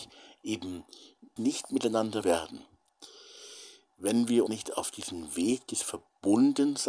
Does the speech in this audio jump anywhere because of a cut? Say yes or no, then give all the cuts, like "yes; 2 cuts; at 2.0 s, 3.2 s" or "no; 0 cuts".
yes; 3 cuts; at 1.4 s, 2.2 s, 4.5 s